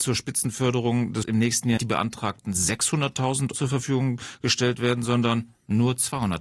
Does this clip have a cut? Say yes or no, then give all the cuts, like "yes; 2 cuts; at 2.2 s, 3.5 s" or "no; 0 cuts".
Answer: yes; 3 cuts; at 1.2 s, 1.8 s, 3.5 s